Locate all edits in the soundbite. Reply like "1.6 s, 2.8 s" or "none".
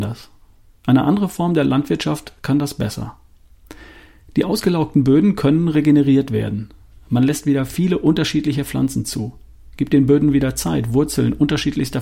none